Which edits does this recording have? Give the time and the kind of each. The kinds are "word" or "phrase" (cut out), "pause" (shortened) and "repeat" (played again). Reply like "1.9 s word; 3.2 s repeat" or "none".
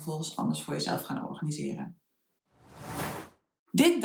none

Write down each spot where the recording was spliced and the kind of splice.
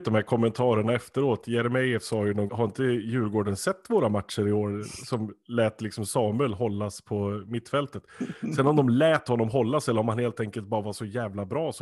2.5 s word

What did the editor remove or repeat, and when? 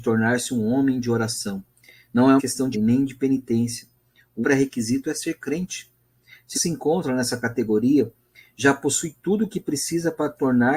2.4 s word; 2.7 s word; 4.4 s word; 6.5 s word

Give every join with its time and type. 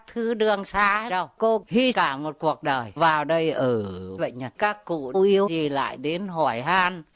1.1 s word; 1.9 s word; 3.0 s word; 4.2 s word; 4.6 s word; 5.1 s word; 5.5 s word

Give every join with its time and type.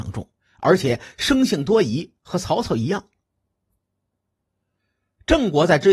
none

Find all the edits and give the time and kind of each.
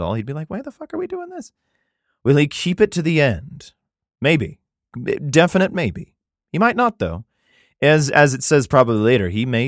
none

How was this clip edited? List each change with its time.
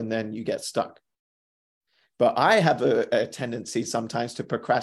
none

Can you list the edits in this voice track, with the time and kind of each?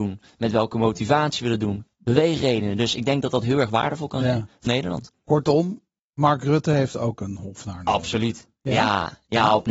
4.7 s word; 6.0 s pause

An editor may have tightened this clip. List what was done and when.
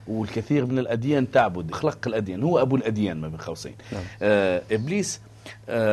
1.7 s phrase

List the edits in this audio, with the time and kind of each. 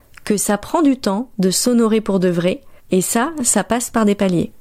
2.8 s pause

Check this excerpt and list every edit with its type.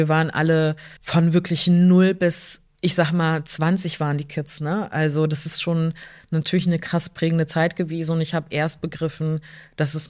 1.0 s pause; 2.7 s pause

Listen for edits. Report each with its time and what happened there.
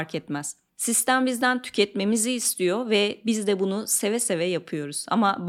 none

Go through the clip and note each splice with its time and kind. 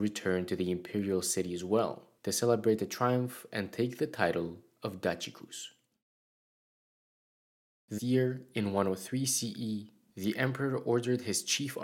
2.2 s pause; 8.0 s word

